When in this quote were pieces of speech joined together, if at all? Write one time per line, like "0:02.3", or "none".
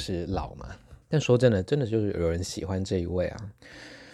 0:01.0